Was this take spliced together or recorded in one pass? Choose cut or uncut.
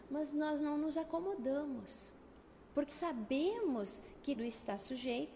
cut